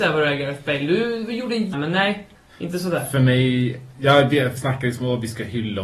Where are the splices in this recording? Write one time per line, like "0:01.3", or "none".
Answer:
0:01.7
0:02.4
0:04.6